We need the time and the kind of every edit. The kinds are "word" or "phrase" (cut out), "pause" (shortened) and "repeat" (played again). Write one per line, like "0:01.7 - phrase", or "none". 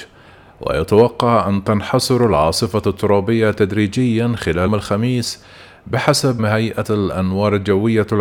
0:04.7 - word
0:06.4 - phrase